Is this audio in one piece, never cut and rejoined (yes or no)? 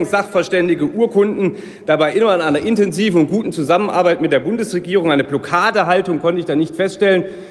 yes